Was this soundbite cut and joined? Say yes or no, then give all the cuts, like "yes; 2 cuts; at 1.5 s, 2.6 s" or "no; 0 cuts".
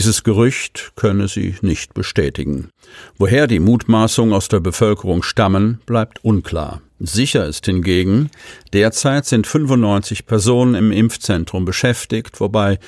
yes; 1 cut; at 6.9 s